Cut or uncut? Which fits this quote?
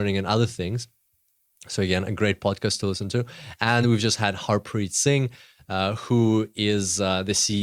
uncut